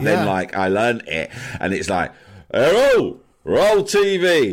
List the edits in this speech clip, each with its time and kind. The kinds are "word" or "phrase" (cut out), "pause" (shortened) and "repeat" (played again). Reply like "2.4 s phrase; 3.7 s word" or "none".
none